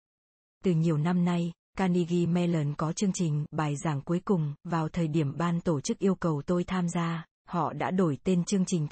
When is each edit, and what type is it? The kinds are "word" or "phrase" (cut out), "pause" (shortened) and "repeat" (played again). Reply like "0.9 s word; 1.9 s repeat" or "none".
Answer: none